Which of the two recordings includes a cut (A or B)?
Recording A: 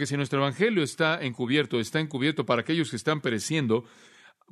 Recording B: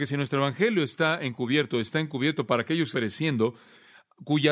B